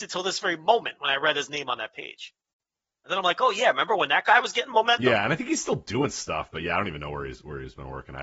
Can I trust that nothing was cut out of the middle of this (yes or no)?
yes